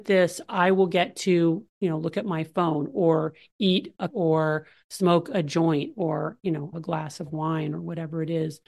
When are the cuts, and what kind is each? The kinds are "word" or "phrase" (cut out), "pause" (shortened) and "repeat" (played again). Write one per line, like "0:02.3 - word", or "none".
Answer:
0:04.1 - word
0:06.7 - word